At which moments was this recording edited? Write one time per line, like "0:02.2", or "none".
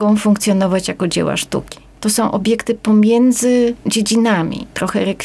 0:03.8